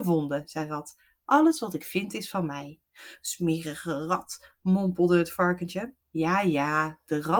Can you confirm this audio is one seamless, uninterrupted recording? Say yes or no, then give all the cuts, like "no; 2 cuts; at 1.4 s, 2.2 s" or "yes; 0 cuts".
no; 1 cut; at 6.0 s